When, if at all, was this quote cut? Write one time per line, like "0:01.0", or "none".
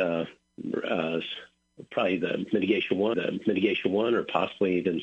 0:03.1